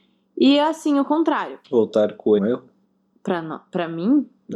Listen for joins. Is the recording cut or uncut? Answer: cut